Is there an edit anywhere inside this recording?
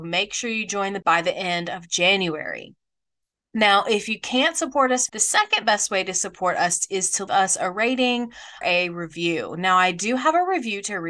yes; 4 cuts; at 1.0 s, 5.1 s, 7.3 s, 8.6 s

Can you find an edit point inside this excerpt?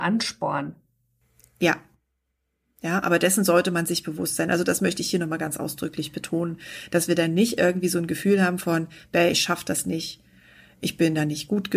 no; 0 cuts

